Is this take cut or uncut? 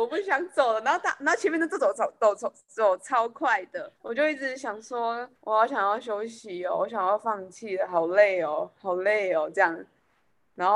cut